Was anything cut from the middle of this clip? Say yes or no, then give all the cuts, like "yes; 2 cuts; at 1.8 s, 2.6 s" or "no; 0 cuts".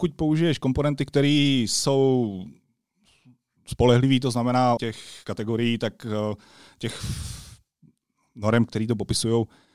yes; 1 cut; at 4.8 s